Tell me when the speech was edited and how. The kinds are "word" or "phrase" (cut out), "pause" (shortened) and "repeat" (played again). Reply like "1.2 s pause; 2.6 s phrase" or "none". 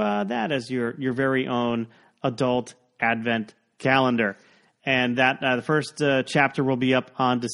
none